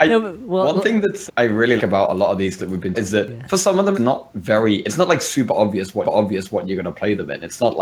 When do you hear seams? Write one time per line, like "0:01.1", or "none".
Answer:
0:01.3
0:01.8
0:02.6
0:02.9
0:03.9
0:06.0